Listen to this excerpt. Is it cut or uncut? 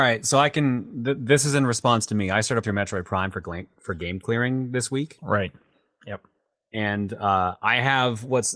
cut